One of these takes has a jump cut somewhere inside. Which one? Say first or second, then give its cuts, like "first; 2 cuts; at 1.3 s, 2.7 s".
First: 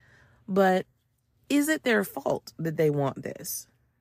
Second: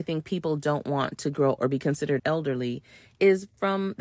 second; 2 cuts; at 1.6 s, 2.2 s